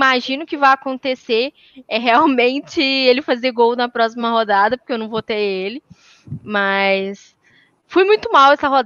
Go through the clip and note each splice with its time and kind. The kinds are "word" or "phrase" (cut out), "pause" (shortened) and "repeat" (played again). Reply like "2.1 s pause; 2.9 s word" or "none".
none